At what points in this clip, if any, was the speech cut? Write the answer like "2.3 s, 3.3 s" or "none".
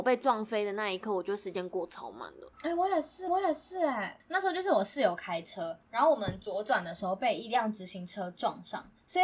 2.5 s, 3.3 s, 5.8 s

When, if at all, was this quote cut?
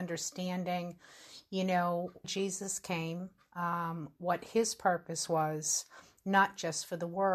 2.2 s

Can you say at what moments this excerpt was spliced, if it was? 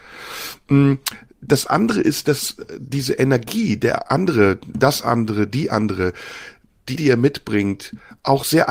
7.0 s

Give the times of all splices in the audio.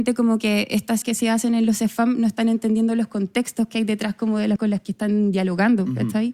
1.0 s, 4.6 s

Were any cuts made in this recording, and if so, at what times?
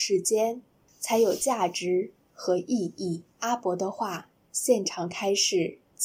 3.3 s

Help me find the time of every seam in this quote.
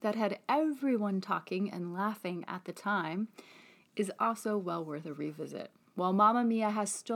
none

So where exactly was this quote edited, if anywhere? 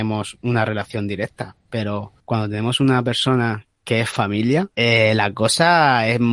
2.2 s, 3.7 s, 4.7 s

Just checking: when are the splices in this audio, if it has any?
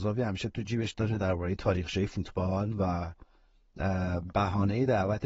none

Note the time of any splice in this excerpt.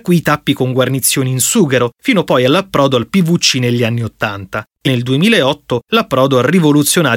4.9 s

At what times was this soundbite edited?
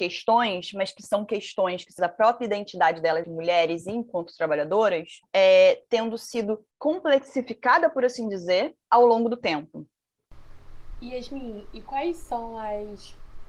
2.0 s, 3.2 s, 5.2 s, 6.7 s, 8.8 s

